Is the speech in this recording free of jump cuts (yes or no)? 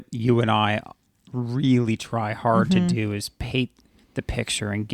yes